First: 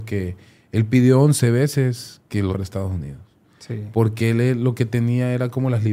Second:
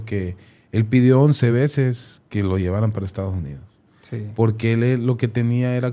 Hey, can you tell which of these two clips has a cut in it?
first; 1 cut; at 2.5 s

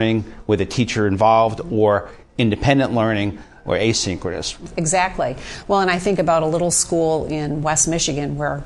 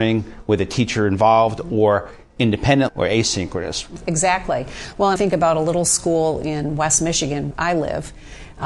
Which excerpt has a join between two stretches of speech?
second; 3 cuts; at 2.9 s, 5.2 s, 7.5 s

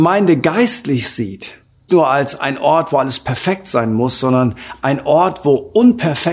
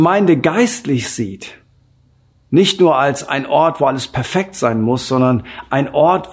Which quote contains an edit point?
first; 1 cut; at 1.9 s

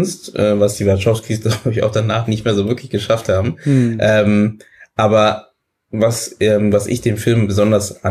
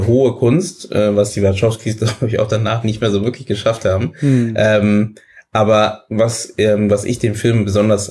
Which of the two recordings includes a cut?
second; 1 cut; at 6.1 s

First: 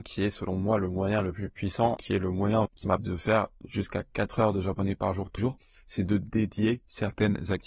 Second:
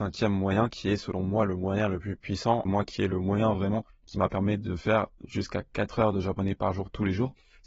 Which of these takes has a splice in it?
first; 4 cuts; at 2.0 s, 2.7 s, 3.0 s, 5.4 s

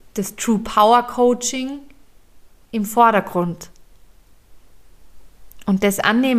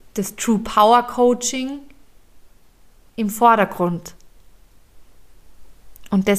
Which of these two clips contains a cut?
first; 1 cut; at 2.5 s

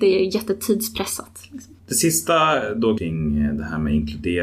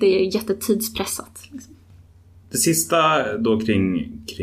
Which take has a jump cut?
first; 2 cuts; at 1.8 s, 3.0 s

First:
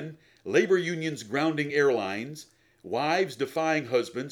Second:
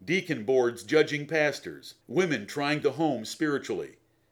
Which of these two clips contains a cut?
second; 2 cuts; at 2.0 s, 2.8 s

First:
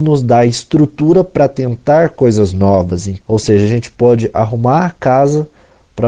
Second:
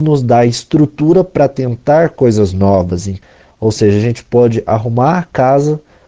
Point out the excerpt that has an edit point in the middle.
first; 1 cut; at 3.2 s

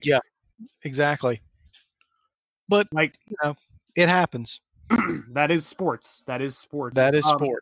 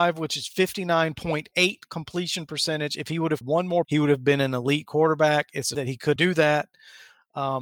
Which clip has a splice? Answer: second; 4 cuts; at 3.4 s, 3.8 s, 5.7 s, 6.2 s

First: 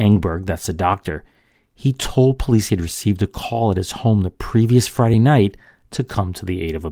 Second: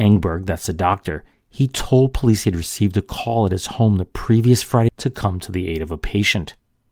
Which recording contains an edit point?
second; 2 cuts; at 1.3 s, 4.9 s

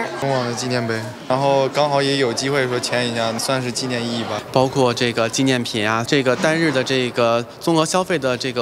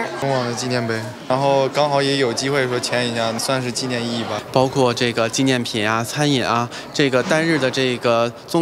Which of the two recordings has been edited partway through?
first; 1 cut; at 6.1 s

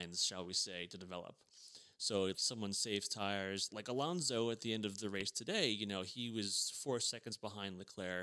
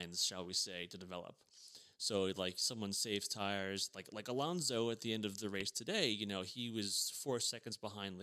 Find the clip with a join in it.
first; 2 cuts; at 2.3 s, 3.7 s

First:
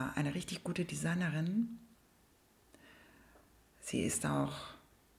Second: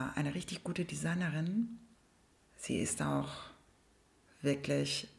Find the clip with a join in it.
second; 1 cut; at 2.4 s

